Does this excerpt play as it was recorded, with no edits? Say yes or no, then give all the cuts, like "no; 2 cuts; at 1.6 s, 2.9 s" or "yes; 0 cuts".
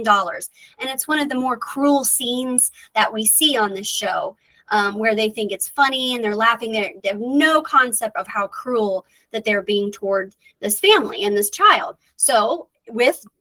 no; 1 cut; at 8.2 s